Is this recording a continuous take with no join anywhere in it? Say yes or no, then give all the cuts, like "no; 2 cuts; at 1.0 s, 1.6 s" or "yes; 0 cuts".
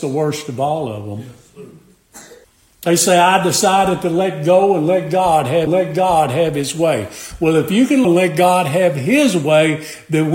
no; 3 cuts; at 2.4 s, 5.7 s, 8.0 s